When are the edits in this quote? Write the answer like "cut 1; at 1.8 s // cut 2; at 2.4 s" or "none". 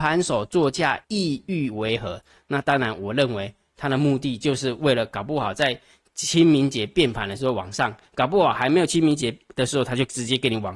cut 1; at 1.0 s